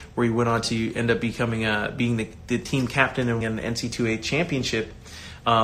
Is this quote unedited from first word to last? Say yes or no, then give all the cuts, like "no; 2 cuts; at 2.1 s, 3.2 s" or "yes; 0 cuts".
no; 1 cut; at 3.4 s